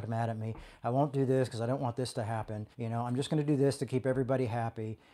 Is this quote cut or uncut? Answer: cut